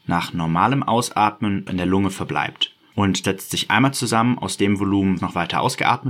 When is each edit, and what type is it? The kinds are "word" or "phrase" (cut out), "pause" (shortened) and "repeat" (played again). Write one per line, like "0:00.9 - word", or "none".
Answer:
0:01.7 - word
0:03.2 - word
0:05.2 - word